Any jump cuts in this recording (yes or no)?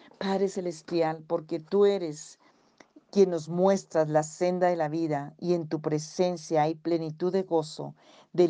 no